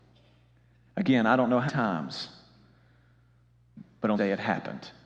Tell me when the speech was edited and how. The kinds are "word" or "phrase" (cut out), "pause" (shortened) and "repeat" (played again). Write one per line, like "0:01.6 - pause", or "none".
0:01.7 - word
0:04.2 - word